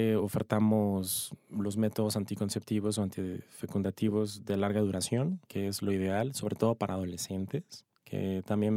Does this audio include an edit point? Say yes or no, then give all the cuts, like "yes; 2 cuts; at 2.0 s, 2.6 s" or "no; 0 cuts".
yes; 1 cut; at 5.4 s